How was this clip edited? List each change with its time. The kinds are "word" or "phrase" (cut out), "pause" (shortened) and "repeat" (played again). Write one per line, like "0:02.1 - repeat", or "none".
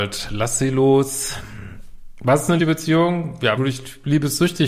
0:02.6 - word
0:03.6 - word